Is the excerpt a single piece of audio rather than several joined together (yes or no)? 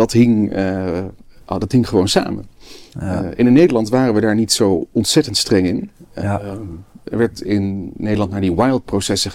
yes